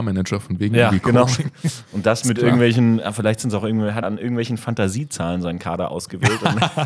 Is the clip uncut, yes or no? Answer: no